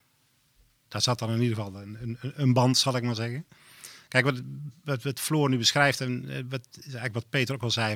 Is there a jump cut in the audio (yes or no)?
no